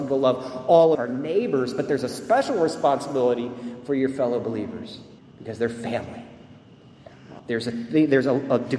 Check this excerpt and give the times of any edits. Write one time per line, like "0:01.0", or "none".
0:00.9
0:05.2
0:07.4